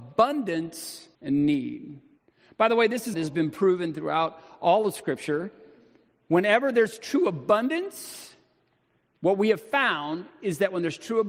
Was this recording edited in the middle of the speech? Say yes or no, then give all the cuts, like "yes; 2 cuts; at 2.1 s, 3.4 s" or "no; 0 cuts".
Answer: yes; 3 cuts; at 1.1 s, 2.2 s, 3.1 s